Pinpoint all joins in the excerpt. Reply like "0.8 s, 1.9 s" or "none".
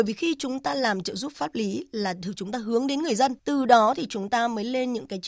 3.4 s